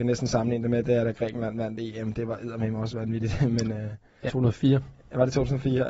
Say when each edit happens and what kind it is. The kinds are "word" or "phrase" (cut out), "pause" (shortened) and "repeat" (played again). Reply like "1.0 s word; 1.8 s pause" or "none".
4.3 s word